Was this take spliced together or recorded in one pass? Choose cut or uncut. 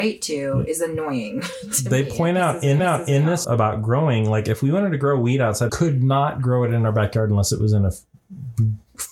cut